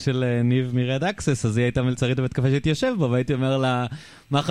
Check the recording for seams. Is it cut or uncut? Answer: uncut